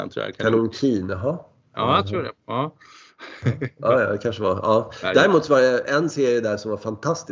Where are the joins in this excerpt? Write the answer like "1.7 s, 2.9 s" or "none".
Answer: none